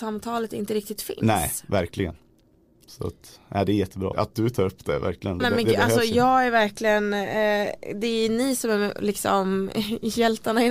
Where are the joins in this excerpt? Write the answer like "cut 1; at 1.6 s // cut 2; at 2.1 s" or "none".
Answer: cut 1; at 4.1 s // cut 2; at 5.4 s